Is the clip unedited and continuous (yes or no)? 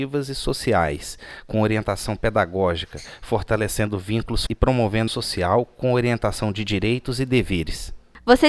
no